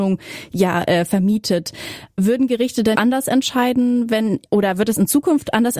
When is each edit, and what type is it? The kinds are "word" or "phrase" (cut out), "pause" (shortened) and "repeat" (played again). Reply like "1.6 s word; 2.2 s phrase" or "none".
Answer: 2.9 s word; 4.5 s pause